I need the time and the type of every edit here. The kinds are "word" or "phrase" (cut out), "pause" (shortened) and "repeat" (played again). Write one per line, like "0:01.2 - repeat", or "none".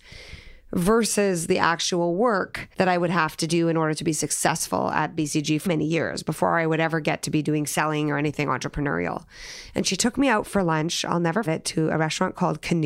0:02.7 - pause
0:05.7 - word
0:11.5 - word